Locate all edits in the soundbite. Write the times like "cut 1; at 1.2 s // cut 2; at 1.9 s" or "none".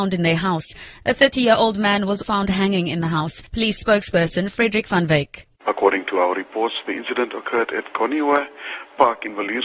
cut 1; at 2.2 s // cut 2; at 3.5 s // cut 3; at 5.6 s